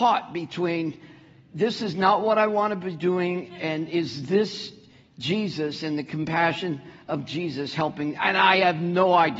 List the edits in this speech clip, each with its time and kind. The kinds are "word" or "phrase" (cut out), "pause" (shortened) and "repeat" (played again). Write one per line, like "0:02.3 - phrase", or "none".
none